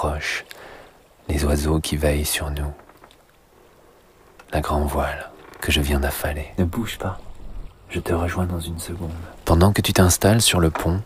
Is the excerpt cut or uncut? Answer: uncut